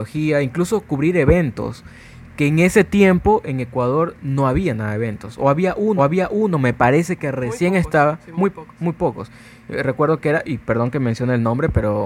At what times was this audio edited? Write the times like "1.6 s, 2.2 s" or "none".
6.0 s